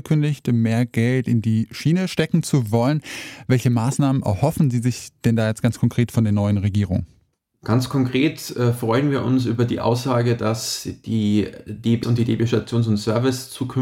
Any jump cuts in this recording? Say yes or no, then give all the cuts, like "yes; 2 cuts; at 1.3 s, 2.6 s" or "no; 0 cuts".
yes; 1 cut; at 12.0 s